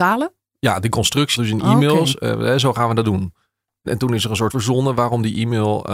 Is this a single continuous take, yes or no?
no